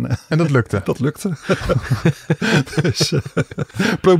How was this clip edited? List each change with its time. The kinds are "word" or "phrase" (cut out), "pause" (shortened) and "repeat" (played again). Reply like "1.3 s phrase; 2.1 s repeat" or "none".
none

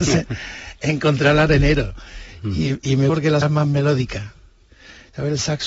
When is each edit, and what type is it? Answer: 3.1 s word; 3.4 s word

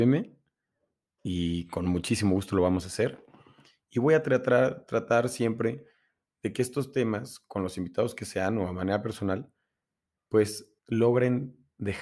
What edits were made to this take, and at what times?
10.8 s pause

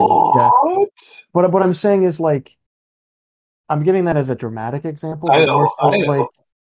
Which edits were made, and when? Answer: none

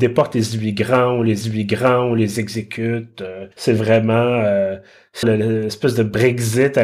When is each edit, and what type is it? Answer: 1.4 s repeat; 3.5 s pause; 5.2 s word

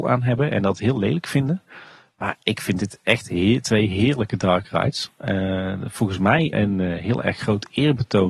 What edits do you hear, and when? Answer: 6.5 s word

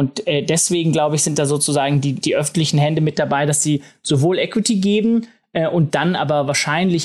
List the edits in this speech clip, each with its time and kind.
2.2 s word

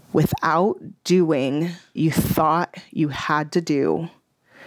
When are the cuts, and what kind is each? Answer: 2.0 s word

